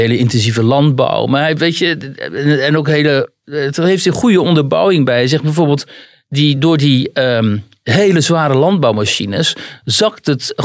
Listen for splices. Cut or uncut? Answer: uncut